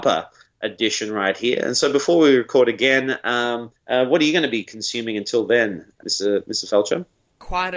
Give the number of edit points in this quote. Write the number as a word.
one